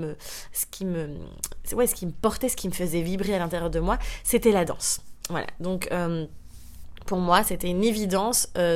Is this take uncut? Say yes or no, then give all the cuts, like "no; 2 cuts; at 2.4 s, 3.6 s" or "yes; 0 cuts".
yes; 0 cuts